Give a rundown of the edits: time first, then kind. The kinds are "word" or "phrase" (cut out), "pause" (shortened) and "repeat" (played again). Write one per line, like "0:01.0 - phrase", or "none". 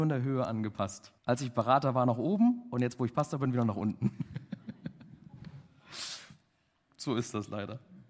0:01.2 - pause